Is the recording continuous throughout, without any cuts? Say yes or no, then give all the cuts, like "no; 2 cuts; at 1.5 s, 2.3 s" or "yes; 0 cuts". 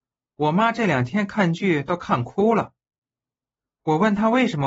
yes; 0 cuts